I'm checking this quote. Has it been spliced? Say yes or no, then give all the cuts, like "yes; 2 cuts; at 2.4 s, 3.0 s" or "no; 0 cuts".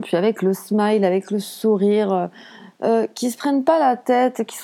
no; 0 cuts